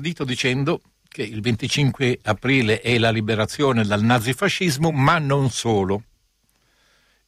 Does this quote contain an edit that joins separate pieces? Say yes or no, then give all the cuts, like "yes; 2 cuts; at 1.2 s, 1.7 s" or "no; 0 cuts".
no; 0 cuts